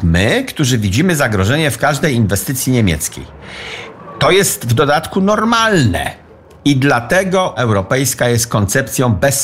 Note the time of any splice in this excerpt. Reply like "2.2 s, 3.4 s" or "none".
7.6 s